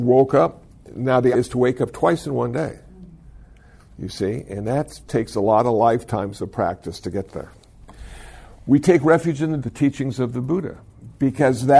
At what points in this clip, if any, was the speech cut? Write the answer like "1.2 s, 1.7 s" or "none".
1.3 s, 5.1 s, 9.6 s